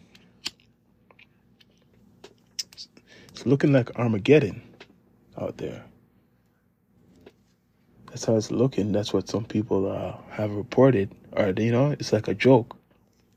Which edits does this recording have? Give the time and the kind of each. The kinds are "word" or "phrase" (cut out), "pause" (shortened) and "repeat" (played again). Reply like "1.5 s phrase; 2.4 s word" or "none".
none